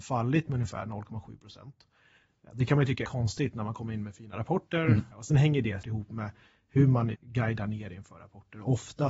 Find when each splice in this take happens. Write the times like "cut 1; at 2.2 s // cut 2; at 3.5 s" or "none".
cut 1; at 3.0 s // cut 2; at 5.1 s // cut 3; at 5.8 s // cut 4; at 7.1 s